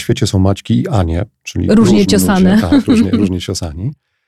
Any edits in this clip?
no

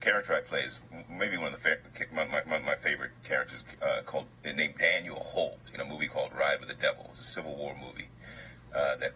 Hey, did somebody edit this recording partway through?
yes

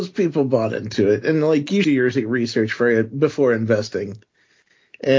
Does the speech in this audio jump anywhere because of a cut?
yes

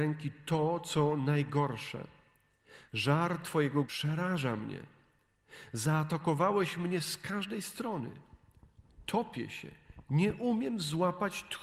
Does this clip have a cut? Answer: yes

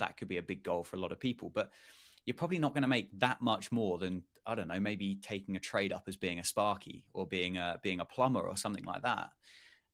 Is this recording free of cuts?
yes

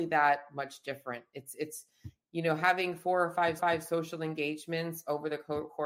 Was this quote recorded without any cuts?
no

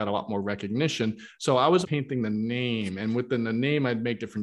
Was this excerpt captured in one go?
no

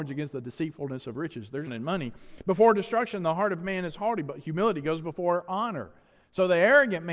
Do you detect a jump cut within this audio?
yes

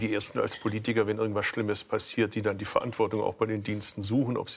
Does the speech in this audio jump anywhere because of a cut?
no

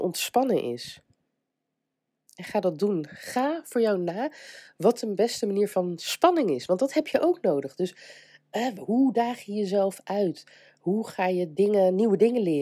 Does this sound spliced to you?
no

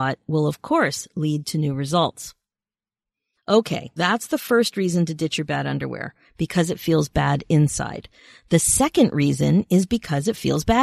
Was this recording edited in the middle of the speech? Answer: yes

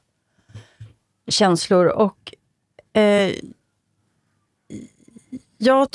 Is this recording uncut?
yes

